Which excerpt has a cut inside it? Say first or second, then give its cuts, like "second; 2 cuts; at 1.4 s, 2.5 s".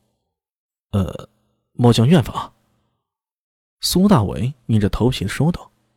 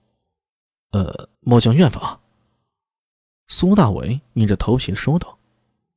second; 1 cut; at 1.3 s